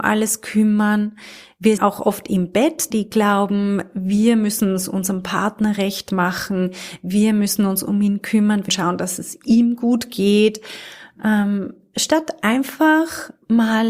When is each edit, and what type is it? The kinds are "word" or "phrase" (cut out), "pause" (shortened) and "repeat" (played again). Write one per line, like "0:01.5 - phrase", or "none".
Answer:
0:01.8 - word
0:02.9 - word
0:08.7 - word

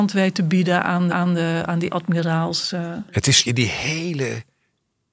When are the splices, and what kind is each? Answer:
0:01.1 - repeat
0:01.9 - word
0:03.4 - word

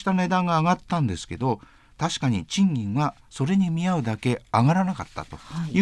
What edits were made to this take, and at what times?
none

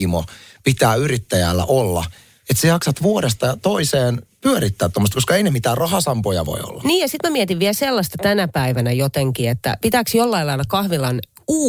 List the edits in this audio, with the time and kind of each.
none

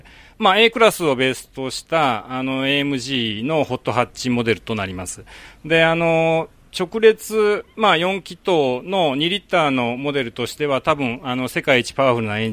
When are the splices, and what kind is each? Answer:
none

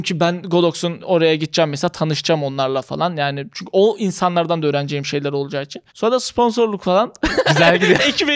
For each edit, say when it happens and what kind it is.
0:05.9 - pause

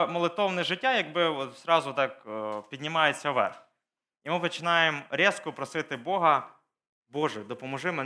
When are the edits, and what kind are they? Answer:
none

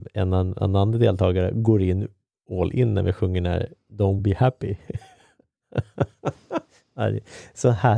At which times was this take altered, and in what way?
0:04.2 - word

